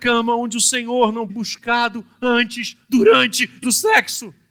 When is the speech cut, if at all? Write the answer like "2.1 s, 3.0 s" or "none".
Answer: 1.3 s, 3.6 s